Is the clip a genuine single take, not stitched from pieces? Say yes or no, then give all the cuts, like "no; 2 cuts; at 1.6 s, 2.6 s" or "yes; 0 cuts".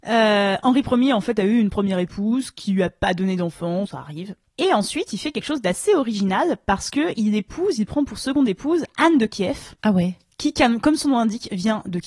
no; 2 cuts; at 3.8 s, 9.8 s